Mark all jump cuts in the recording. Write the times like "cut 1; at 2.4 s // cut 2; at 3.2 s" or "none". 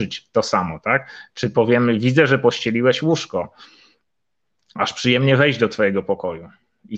none